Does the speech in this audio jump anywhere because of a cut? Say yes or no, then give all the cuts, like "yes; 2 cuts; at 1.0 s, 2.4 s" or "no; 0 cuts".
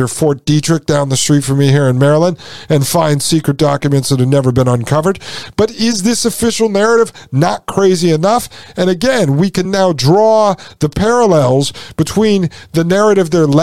no; 0 cuts